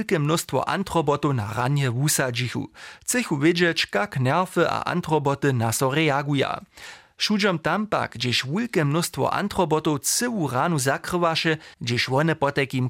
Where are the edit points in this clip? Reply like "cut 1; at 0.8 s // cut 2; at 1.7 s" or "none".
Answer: cut 1; at 11.7 s